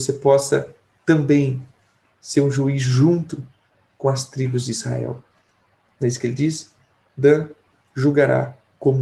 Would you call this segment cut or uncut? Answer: uncut